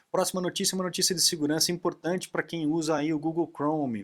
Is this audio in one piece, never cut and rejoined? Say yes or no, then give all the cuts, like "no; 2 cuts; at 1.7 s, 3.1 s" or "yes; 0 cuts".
yes; 0 cuts